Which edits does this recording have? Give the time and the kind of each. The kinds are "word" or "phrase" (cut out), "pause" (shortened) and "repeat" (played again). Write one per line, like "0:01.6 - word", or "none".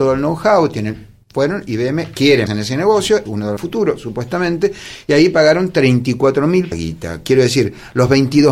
0:01.2 - pause
0:02.5 - word
0:03.3 - word
0:03.6 - phrase
0:06.7 - phrase